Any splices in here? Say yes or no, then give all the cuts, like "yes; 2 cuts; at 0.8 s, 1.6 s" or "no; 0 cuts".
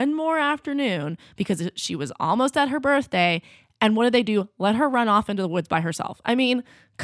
no; 0 cuts